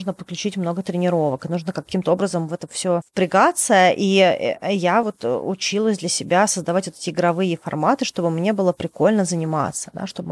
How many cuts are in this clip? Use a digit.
0